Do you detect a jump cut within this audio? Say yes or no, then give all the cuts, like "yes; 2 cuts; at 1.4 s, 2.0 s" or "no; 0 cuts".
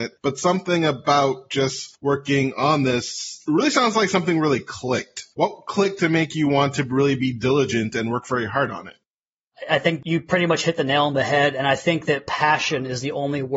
no; 0 cuts